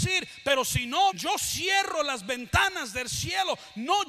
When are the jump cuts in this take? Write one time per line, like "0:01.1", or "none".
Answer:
0:01.1